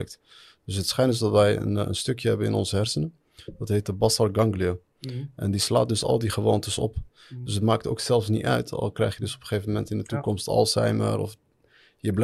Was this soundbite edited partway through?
no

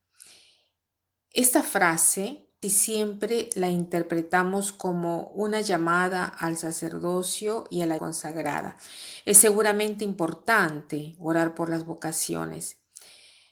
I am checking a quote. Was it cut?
yes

